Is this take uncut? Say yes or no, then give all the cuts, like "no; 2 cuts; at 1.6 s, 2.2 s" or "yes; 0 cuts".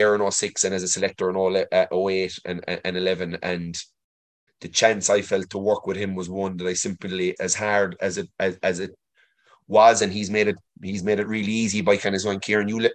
no; 2 cuts; at 4.5 s, 7.4 s